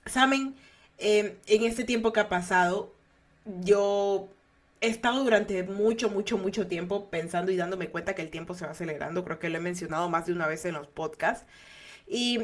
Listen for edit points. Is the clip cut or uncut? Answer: uncut